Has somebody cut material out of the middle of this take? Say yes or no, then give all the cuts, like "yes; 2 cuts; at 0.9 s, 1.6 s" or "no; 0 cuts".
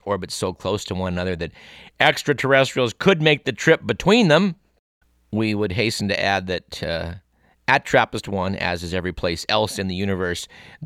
no; 0 cuts